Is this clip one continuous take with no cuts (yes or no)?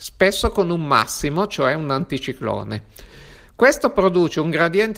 yes